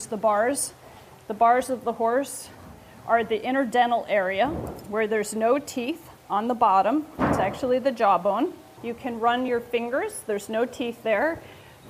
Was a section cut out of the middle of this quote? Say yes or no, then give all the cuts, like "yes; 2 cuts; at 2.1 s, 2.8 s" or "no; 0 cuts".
no; 0 cuts